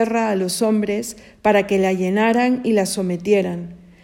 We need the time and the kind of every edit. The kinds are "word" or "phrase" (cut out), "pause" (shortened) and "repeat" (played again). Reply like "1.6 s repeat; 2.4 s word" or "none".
none